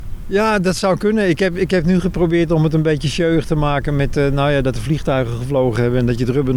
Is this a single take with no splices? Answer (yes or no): yes